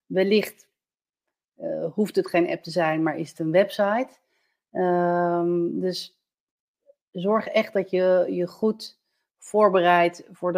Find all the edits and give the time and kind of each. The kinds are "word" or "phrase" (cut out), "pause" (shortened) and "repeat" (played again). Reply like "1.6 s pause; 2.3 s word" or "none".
none